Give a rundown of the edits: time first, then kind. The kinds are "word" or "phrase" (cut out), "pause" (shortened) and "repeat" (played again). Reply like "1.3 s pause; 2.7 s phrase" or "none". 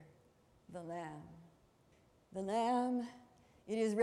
1.9 s pause